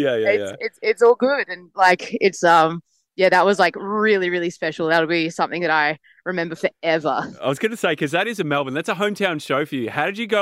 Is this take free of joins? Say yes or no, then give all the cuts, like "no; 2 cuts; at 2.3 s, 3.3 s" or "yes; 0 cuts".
yes; 0 cuts